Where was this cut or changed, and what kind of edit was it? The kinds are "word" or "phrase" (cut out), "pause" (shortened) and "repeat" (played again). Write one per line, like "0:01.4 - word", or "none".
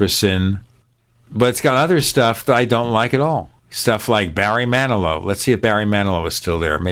0:03.6 - pause